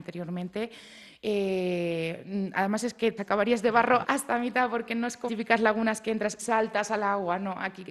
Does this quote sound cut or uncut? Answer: cut